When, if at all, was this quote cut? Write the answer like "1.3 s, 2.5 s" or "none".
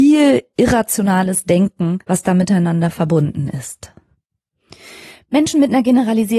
2.0 s